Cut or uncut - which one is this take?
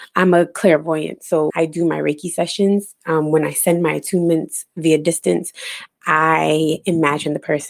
cut